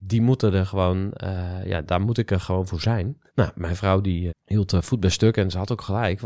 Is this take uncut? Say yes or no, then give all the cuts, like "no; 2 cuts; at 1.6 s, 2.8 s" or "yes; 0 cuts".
no; 2 cuts; at 3.3 s, 4.3 s